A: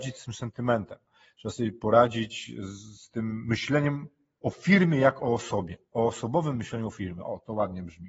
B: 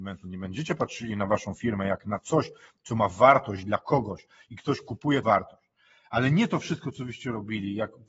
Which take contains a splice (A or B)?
B